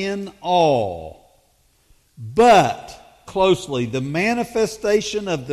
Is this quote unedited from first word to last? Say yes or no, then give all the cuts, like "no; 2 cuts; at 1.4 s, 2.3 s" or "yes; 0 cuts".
no; 1 cut; at 3.3 s